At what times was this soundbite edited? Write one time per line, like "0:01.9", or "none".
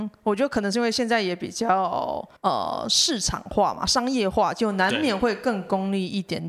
0:02.4